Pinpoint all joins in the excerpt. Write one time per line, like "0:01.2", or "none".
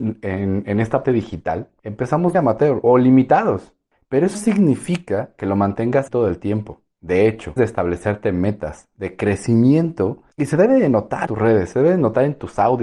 0:01.0
0:02.3
0:02.8
0:04.3
0:06.1
0:07.6
0:11.3